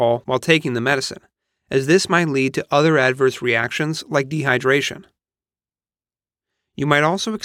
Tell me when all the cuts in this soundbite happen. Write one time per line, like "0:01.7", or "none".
none